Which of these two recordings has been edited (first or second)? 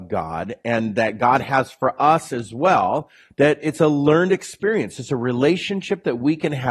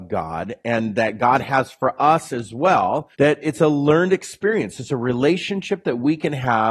second